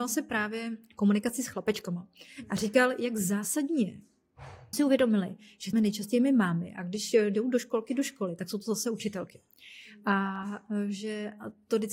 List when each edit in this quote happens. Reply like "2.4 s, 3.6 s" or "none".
4.7 s, 5.7 s